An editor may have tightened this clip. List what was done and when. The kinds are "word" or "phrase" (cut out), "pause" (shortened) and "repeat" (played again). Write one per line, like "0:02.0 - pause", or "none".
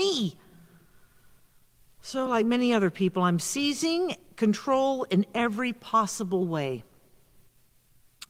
none